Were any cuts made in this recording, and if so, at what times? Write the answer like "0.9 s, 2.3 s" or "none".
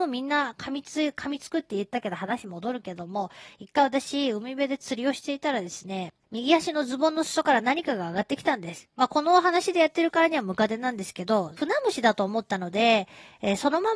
6.2 s, 11.6 s